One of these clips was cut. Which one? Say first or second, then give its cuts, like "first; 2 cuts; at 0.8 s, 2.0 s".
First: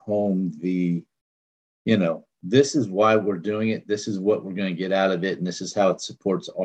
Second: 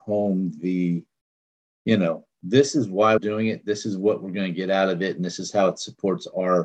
second; 1 cut; at 3.2 s